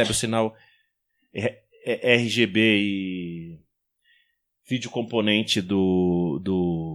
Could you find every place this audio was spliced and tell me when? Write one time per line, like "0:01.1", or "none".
none